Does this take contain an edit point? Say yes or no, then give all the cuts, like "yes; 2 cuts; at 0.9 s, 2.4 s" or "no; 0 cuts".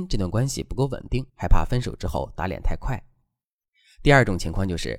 yes; 1 cut; at 1.3 s